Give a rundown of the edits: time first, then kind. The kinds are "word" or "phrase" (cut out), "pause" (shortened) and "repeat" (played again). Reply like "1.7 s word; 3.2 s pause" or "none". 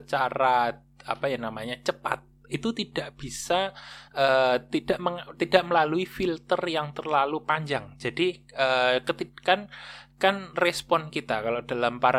none